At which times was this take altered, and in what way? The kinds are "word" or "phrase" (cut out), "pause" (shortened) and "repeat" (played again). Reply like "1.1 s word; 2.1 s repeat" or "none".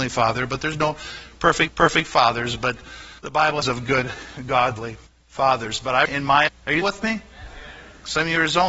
1.7 s repeat; 3.2 s pause; 3.6 s phrase; 5.1 s pause; 6.0 s phrase; 6.5 s word; 6.8 s word